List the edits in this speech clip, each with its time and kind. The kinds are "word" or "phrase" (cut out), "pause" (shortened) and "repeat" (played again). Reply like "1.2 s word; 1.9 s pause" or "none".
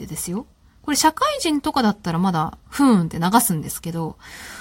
2.6 s pause